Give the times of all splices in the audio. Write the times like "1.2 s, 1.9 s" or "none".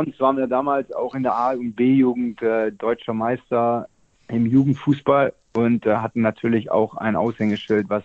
none